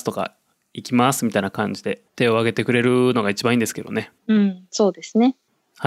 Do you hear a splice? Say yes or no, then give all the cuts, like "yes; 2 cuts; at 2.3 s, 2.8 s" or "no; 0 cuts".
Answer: yes; 2 cuts; at 2.1 s, 4.2 s